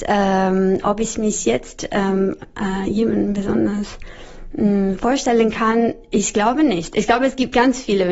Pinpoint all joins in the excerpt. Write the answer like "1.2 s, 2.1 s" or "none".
none